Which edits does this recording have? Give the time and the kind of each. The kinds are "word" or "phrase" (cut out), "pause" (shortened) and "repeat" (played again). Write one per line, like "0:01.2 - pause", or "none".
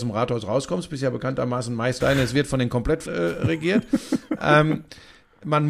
0:02.0 - word
0:03.1 - word